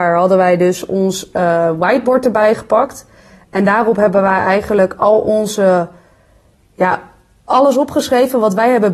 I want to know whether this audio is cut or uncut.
uncut